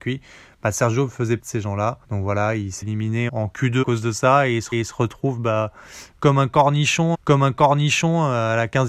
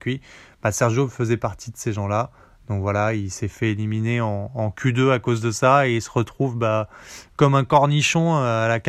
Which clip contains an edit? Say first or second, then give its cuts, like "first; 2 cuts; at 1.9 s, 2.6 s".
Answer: first; 7 cuts; at 1.4 s, 2.0 s, 2.8 s, 3.3 s, 3.8 s, 4.7 s, 7.1 s